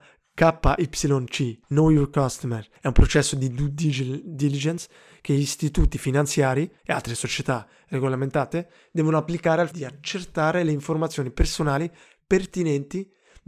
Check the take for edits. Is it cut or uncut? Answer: cut